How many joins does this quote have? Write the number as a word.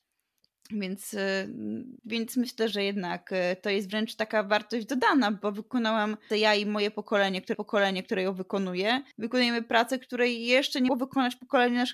six